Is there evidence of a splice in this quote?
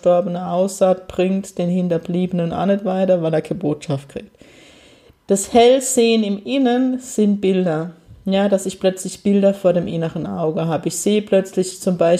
no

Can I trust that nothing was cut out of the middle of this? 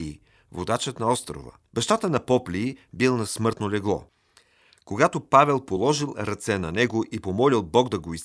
no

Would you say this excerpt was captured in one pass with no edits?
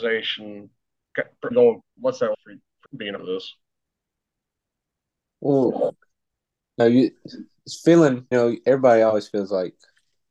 no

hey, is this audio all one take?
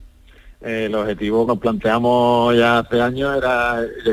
no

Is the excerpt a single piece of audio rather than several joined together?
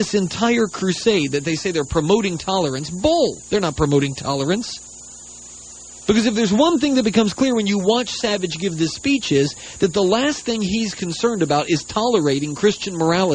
yes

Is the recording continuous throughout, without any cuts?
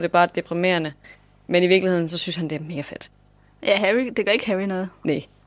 yes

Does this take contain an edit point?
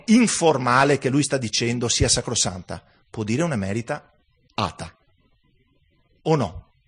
no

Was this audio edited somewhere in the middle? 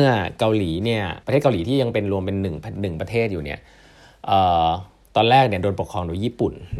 yes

